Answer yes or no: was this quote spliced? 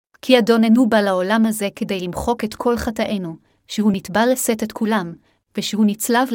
no